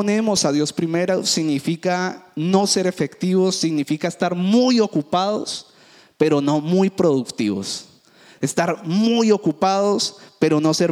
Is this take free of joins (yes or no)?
yes